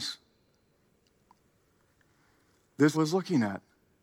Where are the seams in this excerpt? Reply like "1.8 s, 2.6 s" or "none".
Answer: 2.9 s